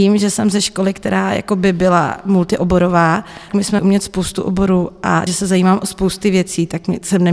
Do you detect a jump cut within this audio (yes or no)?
yes